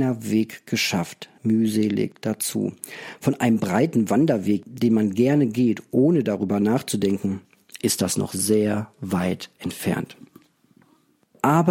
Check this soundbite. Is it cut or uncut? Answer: cut